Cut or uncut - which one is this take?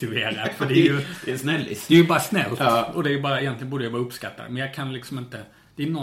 uncut